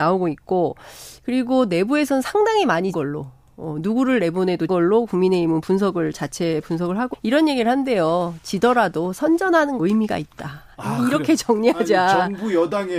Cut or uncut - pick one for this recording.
cut